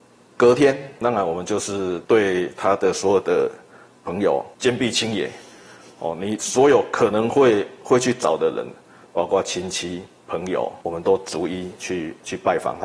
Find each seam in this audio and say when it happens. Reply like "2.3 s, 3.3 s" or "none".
none